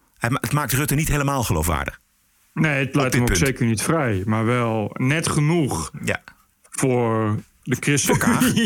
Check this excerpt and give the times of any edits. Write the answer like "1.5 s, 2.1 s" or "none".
none